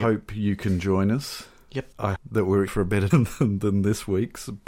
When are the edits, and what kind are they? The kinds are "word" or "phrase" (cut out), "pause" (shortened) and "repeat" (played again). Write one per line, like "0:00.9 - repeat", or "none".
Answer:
0:02.2 - word
0:02.7 - word
0:03.1 - word

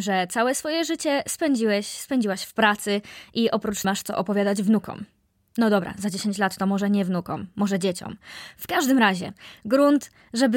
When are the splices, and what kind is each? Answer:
0:03.8 - phrase

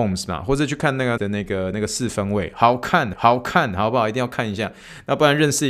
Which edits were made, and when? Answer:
0:01.2 - word
0:03.1 - repeat

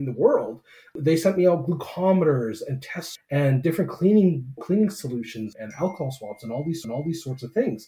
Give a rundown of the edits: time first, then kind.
0:03.1 - word
0:04.6 - phrase
0:05.5 - word
0:06.8 - repeat

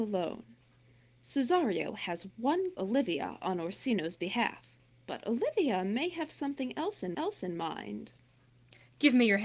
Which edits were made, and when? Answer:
0:02.8 - phrase
0:04.9 - pause
0:07.1 - repeat

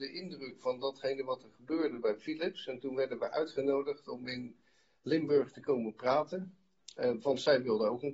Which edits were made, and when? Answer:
none

